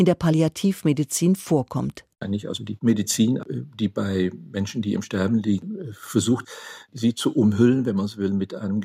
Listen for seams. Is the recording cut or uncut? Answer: cut